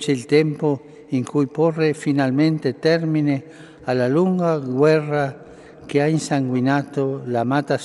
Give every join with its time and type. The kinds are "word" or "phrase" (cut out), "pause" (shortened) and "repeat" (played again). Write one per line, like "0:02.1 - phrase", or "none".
none